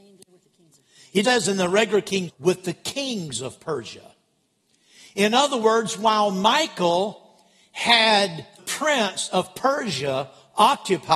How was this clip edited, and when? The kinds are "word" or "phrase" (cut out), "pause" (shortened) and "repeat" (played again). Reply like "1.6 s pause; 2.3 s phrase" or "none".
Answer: 1.2 s word; 2.3 s phrase; 8.6 s word